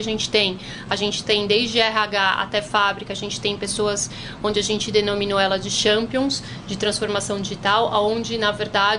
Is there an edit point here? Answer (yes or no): no